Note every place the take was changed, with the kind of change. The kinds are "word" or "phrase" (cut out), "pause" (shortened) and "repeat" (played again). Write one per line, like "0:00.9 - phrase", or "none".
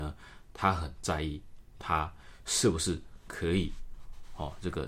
0:01.7 - word